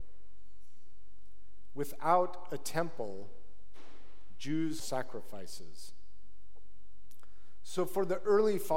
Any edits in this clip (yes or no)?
yes